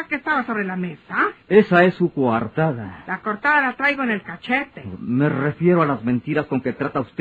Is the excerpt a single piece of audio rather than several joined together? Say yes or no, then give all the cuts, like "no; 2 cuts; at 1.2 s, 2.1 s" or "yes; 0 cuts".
no; 1 cut; at 1.4 s